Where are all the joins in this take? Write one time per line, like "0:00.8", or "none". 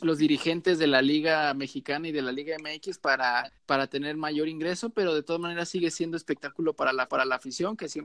0:03.5
0:07.1

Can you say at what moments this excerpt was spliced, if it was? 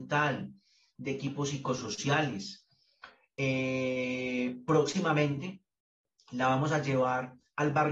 none

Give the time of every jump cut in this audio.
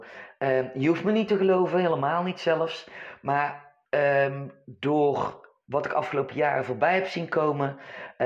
0:03.9

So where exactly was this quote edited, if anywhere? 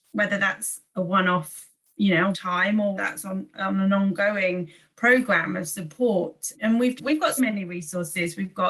0:02.3
0:03.0
0:06.5
0:07.0
0:07.4

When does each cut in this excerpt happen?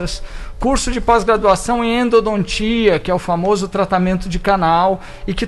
none

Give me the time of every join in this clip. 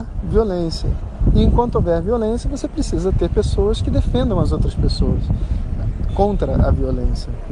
none

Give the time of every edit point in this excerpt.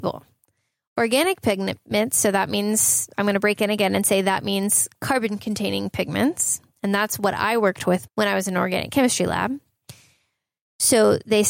0:08.1

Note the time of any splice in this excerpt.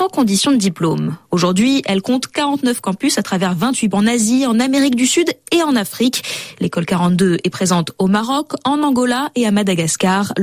0:03.9

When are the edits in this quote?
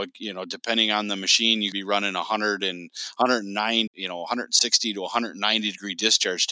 0:01.7
0:03.9

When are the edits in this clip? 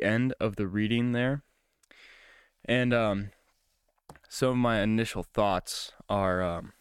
none

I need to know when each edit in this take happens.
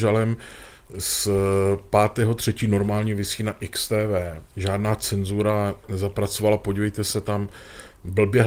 0:04.5

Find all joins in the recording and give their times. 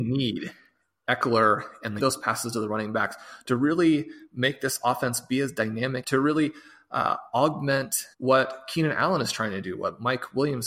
0:02.0
0:06.0
0:08.1

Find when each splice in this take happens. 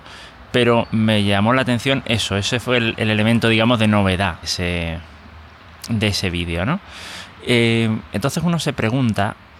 0:04.4

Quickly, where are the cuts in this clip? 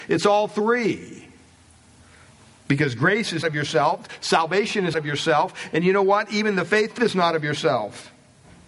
0:03.4
0:04.9
0:07.0

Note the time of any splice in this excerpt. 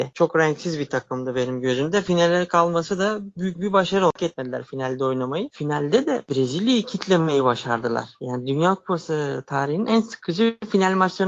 none

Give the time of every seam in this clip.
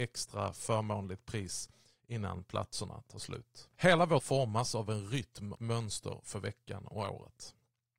0:03.7
0:04.2
0:05.5

